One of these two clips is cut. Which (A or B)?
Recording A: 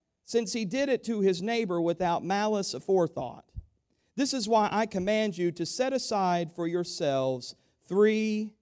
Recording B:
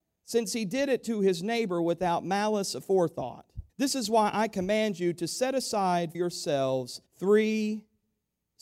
B